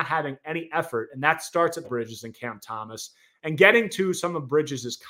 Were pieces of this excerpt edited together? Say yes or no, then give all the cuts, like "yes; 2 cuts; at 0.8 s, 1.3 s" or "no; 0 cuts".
yes; 1 cut; at 1.8 s